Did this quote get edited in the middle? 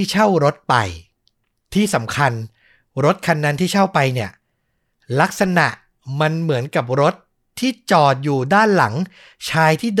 no; 0 cuts

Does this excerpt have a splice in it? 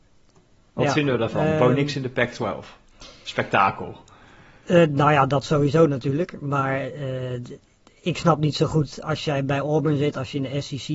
no; 0 cuts

